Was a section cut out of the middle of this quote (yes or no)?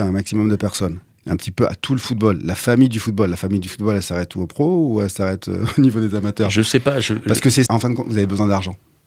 yes